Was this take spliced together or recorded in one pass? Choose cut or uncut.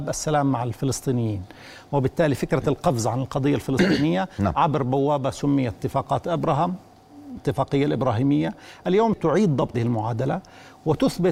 cut